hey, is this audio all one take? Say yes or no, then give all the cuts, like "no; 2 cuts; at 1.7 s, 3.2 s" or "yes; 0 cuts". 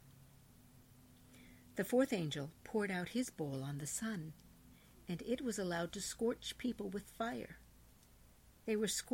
yes; 0 cuts